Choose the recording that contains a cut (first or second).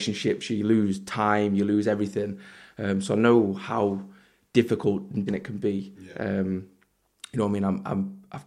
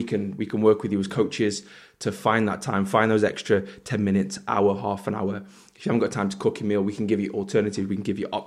first